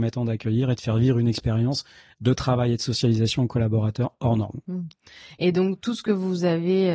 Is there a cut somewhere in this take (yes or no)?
no